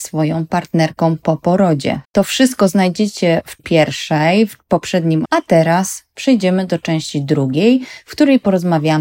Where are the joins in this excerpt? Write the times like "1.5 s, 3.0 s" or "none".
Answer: 2.0 s, 3.6 s, 5.2 s